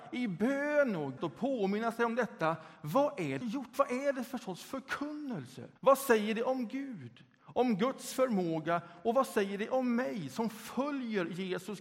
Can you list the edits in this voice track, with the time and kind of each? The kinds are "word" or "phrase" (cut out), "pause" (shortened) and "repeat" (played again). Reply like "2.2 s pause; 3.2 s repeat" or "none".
1.2 s word; 3.4 s phrase; 5.8 s pause